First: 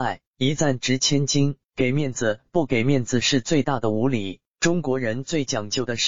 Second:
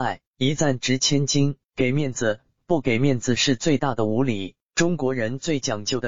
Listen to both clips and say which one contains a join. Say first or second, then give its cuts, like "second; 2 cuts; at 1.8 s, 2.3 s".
first; 1 cut; at 2.5 s